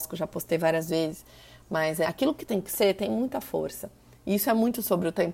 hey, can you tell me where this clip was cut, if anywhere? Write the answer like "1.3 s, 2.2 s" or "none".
2.0 s